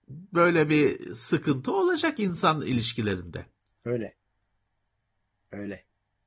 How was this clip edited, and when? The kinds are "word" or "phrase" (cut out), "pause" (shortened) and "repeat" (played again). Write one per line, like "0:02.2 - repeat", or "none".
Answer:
0:03.6 - pause

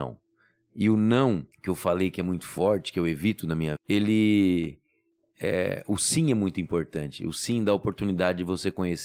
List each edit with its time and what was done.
0:01.5 - pause
0:03.8 - word

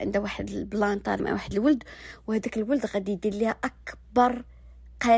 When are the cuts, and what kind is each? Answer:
0:01.2 - word

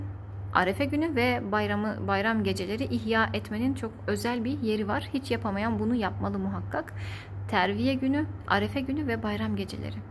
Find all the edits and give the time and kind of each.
none

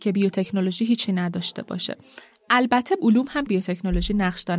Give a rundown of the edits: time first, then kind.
0:01.1 - word
0:03.0 - word
0:03.5 - word

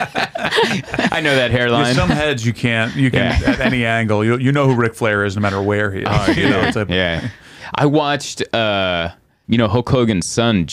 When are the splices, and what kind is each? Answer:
0:09.4 - word

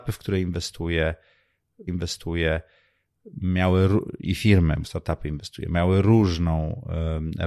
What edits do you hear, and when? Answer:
0:01.9 - repeat
0:04.8 - phrase

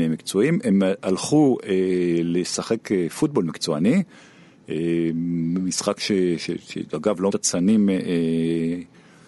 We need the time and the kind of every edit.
0:06.4 - word
0:07.3 - word

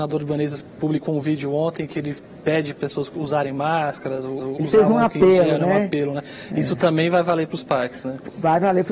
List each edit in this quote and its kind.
0:02.8 - word
0:04.4 - repeat

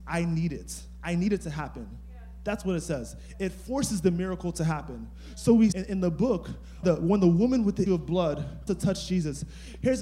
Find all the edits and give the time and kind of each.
0:05.7 - word
0:06.8 - word
0:07.9 - word
0:08.7 - word

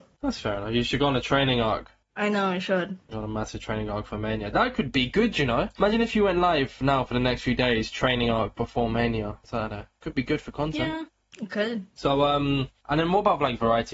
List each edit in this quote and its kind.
none

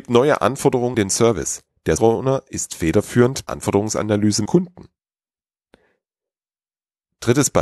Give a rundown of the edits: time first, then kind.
0:00.9 - word
0:02.0 - word
0:03.5 - phrase
0:04.5 - phrase

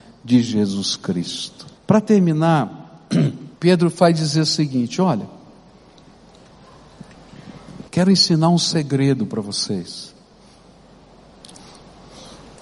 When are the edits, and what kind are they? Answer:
0:01.8 - pause
0:03.6 - pause
0:07.9 - pause

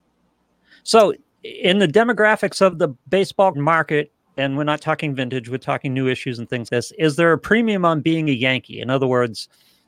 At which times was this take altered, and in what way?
0:03.5 - word
0:06.7 - word

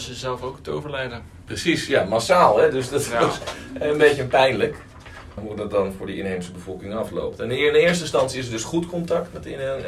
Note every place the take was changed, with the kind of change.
none

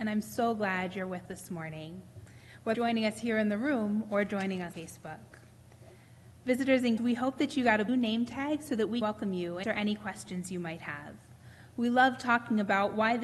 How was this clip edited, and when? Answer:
0:01.3 - word
0:02.7 - word
0:04.7 - word
0:07.0 - word
0:07.9 - word
0:09.0 - word
0:09.6 - word

